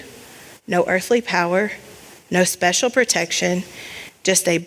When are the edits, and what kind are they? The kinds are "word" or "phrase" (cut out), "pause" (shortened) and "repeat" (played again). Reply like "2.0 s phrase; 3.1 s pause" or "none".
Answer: none